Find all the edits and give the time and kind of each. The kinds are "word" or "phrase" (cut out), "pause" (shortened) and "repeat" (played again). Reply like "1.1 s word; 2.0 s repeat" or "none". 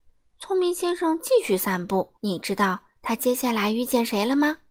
2.2 s pause